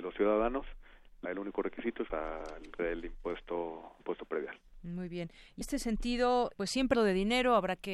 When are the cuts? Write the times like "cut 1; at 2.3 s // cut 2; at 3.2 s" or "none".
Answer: cut 1; at 1.2 s // cut 2; at 2.1 s // cut 3; at 2.8 s // cut 4; at 4.0 s // cut 5; at 5.6 s // cut 6; at 6.5 s // cut 7; at 6.9 s